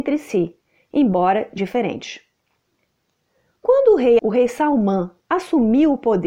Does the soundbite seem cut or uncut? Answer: cut